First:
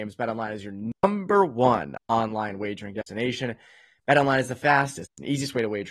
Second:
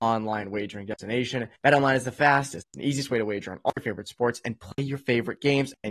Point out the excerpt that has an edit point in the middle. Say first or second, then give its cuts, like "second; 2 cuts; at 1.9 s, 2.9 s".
second; 1 cut; at 1.5 s